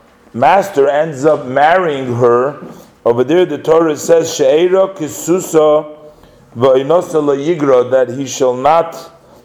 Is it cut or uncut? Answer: uncut